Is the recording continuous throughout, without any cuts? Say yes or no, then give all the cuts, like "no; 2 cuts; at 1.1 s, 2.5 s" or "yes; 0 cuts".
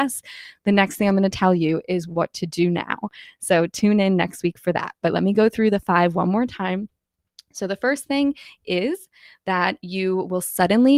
yes; 0 cuts